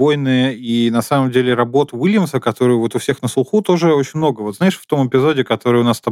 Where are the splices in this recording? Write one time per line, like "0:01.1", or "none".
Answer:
none